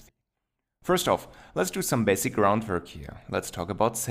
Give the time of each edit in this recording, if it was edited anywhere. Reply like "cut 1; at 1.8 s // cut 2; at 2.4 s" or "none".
none